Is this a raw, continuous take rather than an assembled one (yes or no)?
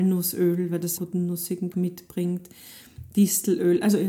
no